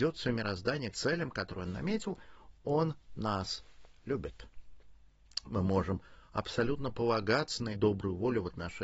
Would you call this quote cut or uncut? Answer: cut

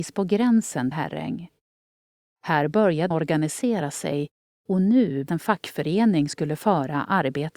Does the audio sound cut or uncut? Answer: cut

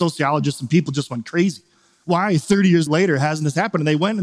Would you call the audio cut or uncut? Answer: cut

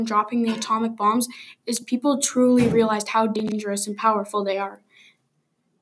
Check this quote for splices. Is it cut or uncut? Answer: uncut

